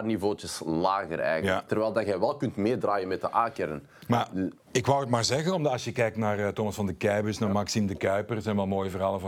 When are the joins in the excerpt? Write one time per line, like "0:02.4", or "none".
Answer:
0:04.6